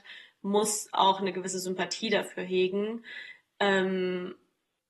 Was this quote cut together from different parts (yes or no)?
no